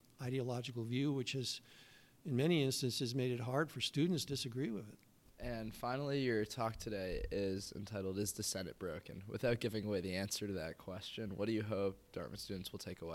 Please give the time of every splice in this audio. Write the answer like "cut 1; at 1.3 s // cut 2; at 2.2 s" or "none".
cut 1; at 4.3 s